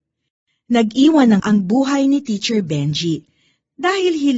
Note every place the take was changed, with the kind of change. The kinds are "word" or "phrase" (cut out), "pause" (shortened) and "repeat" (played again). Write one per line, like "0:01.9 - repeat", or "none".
0:01.4 - word